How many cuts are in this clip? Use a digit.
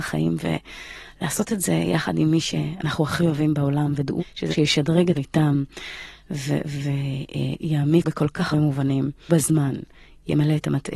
6